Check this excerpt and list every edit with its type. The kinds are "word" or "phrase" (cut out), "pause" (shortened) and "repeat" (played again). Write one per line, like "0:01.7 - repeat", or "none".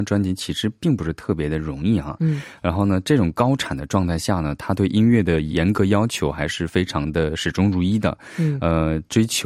none